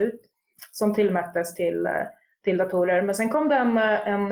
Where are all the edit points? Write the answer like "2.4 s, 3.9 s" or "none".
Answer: none